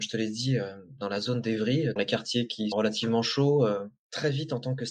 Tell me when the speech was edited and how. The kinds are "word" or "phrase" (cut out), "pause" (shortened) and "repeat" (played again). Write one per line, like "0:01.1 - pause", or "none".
0:02.0 - word
0:02.7 - word